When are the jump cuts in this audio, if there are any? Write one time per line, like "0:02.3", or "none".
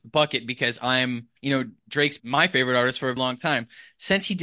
0:01.4
0:02.2
0:03.2